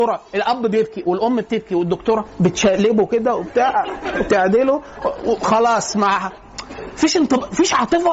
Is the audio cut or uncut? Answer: uncut